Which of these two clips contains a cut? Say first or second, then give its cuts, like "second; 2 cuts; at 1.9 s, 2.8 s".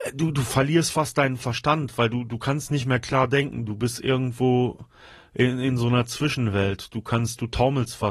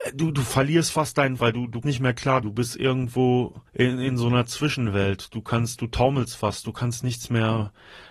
second; 4 cuts; at 1.4 s, 1.8 s, 2.4 s, 3.7 s